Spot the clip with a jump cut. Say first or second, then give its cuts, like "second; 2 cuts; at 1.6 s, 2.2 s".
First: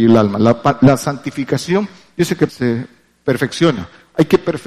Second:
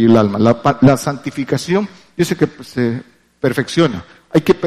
first; 1 cut; at 2.5 s